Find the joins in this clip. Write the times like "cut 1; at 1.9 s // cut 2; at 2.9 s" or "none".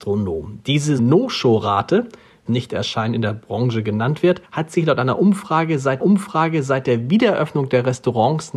cut 1; at 1.0 s // cut 2; at 2.5 s // cut 3; at 4.4 s // cut 4; at 6.0 s